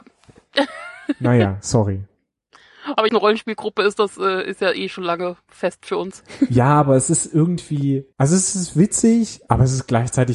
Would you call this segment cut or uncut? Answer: cut